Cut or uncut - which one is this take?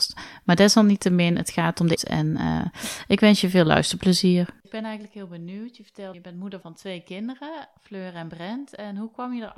cut